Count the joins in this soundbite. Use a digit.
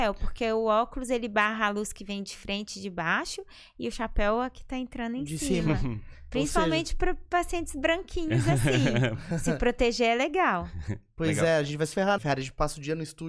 1